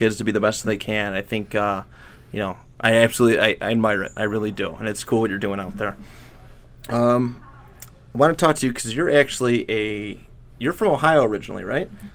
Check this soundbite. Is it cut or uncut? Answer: uncut